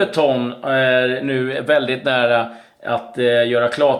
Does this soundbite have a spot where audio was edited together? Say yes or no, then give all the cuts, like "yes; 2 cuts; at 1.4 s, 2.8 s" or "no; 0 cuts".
no; 0 cuts